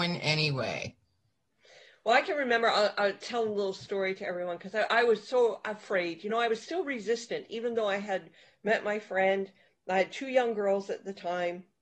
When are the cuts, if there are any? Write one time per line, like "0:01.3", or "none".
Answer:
none